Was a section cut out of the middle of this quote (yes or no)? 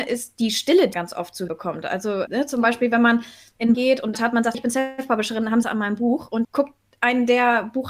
yes